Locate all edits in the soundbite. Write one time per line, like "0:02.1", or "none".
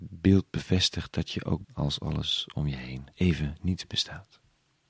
0:01.6
0:03.1